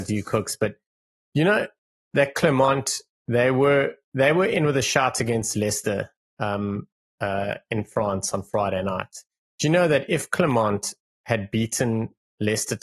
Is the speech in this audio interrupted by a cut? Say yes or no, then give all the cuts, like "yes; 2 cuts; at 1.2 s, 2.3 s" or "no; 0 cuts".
no; 0 cuts